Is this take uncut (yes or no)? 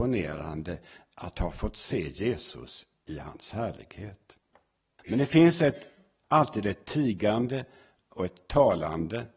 yes